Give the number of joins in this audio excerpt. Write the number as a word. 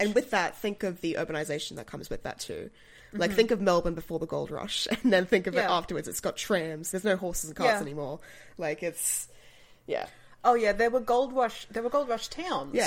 one